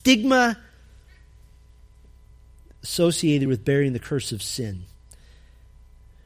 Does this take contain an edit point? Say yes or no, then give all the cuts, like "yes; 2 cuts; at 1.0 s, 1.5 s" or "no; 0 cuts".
no; 0 cuts